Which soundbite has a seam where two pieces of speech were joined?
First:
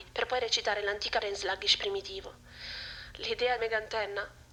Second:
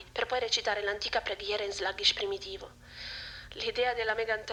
first; 2 cuts; at 1.2 s, 3.6 s

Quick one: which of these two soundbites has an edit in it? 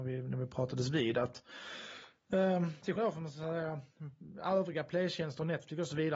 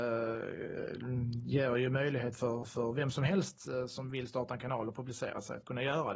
first; 1 cut; at 3.0 s

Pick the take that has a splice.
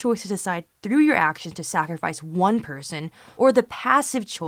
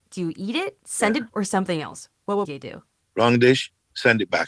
second; 2 cuts; at 1.3 s, 2.4 s

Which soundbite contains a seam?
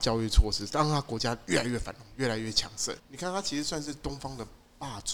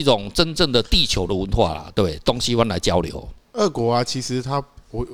first; 1 cut; at 3.0 s

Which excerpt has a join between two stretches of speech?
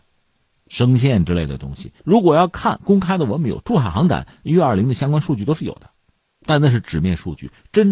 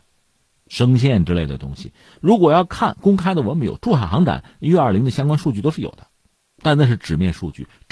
first; 1 cut; at 2.0 s

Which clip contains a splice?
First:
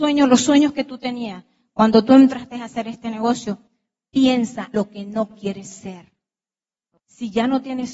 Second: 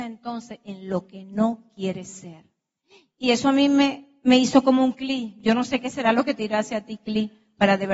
first; 1 cut; at 4.7 s

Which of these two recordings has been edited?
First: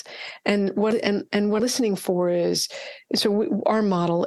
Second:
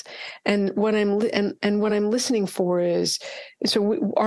first; 2 cuts; at 0.9 s, 1.6 s

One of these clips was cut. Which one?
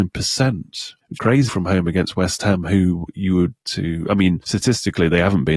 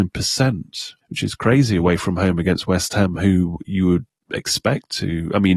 first; 3 cuts; at 1.2 s, 1.5 s, 3.6 s

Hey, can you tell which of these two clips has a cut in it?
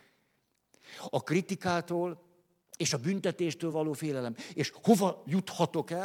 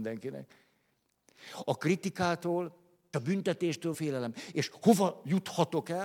second; 2 cuts; at 3.1 s, 3.9 s

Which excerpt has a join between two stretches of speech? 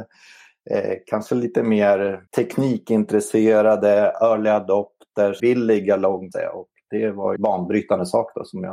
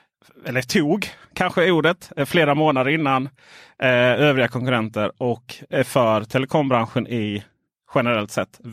first; 4 cuts; at 2.3 s, 5.4 s, 6.3 s, 7.4 s

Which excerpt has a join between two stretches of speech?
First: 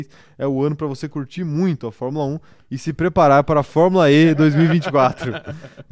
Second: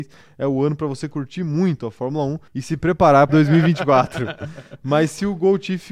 second; 2 cuts; at 2.5 s, 3.3 s

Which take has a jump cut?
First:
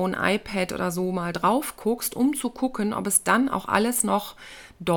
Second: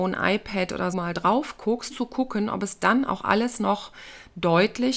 second; 2 cuts; at 0.9 s, 1.9 s

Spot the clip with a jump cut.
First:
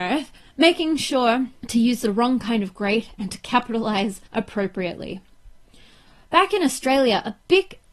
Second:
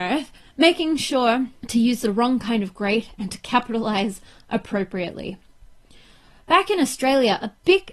first; 1 cut; at 4.3 s

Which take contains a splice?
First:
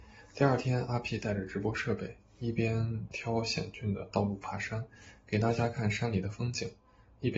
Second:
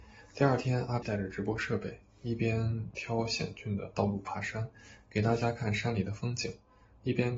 second; 1 cut; at 1.0 s

